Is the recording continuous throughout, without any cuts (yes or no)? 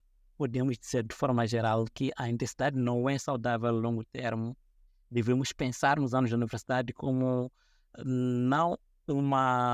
yes